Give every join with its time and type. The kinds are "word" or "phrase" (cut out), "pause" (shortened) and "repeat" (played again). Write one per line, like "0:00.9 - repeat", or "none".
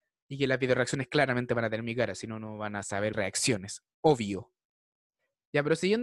0:03.1 - word